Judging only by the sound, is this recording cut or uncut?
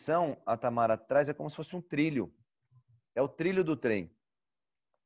uncut